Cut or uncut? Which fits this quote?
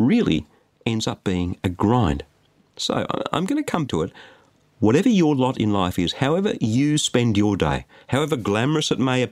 cut